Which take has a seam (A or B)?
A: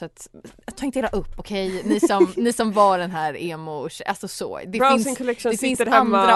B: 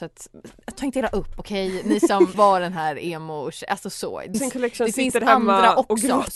B